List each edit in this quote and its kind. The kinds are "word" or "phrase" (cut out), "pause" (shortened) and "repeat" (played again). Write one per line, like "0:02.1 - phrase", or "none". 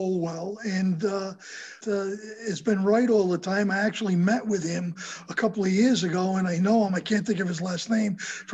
0:01.8 - phrase